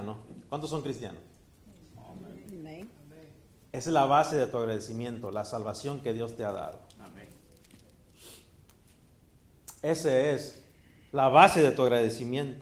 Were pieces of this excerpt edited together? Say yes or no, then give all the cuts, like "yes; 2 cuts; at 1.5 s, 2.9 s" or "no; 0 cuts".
no; 0 cuts